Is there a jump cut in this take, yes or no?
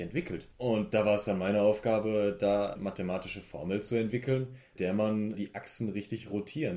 yes